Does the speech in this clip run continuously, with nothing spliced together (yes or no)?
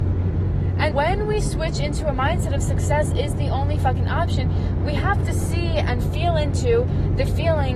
no